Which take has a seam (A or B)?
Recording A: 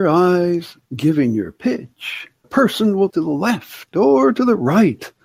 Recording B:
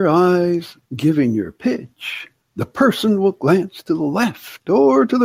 A